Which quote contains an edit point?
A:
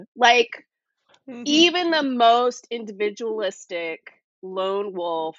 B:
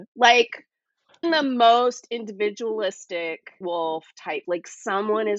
B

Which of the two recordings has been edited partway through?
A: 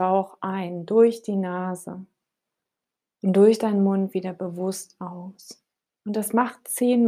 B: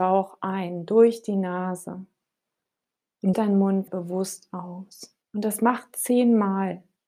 B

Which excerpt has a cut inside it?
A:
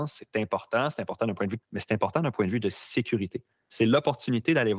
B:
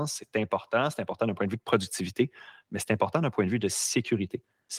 A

